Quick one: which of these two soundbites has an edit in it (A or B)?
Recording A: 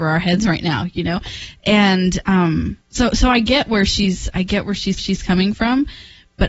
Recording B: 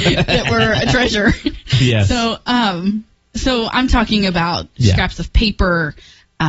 A